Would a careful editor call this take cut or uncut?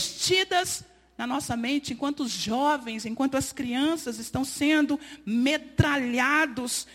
uncut